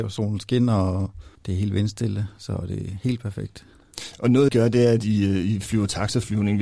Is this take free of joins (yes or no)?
no